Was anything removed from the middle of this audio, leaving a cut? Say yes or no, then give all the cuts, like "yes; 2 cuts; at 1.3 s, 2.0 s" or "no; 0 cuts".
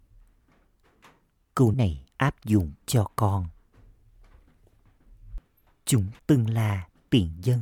yes; 4 cuts; at 1.7 s, 2.1 s, 2.8 s, 6.2 s